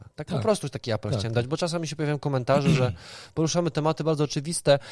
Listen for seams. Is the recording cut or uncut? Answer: uncut